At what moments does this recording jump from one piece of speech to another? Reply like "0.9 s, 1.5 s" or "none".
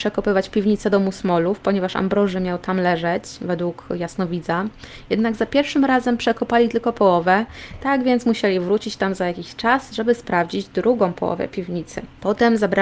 none